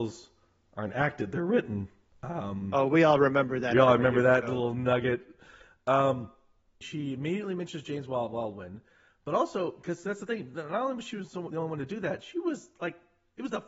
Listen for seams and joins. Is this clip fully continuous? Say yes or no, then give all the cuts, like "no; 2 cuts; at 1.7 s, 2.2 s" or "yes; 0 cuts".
yes; 0 cuts